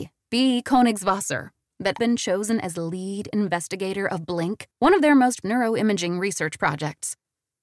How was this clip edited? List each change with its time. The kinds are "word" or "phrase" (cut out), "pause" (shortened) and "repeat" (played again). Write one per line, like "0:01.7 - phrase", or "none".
0:02.0 - word
0:04.7 - pause
0:05.4 - word